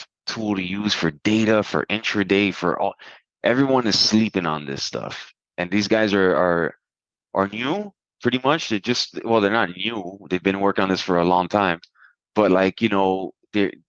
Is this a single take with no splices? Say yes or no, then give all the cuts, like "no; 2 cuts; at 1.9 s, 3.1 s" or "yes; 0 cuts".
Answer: yes; 0 cuts